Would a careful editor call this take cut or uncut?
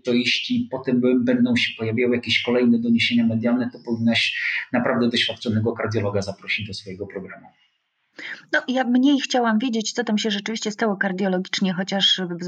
uncut